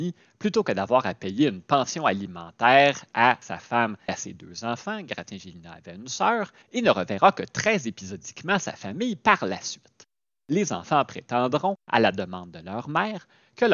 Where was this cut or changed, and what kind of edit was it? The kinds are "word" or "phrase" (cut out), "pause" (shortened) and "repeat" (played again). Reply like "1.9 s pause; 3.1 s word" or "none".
4.1 s word; 6.6 s pause